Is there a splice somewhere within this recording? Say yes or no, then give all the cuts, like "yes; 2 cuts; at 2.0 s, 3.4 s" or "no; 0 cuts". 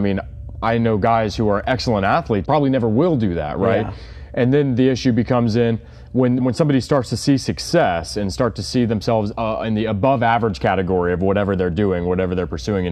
yes; 2 cuts; at 2.4 s, 6.4 s